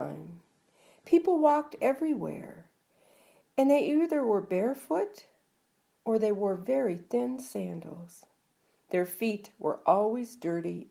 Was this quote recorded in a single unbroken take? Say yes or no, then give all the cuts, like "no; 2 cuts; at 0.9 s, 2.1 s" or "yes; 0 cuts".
yes; 0 cuts